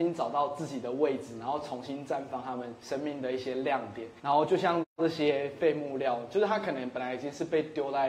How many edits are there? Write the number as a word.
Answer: two